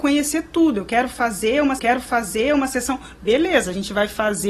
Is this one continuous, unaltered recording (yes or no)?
no